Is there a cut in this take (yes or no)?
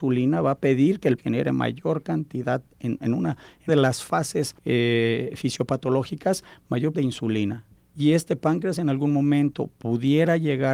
yes